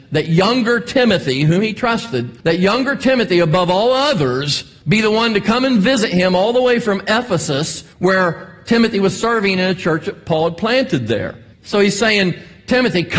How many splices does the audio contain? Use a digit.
4